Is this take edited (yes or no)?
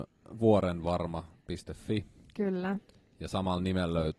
no